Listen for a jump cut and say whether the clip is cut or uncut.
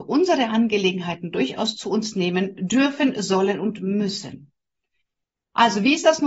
uncut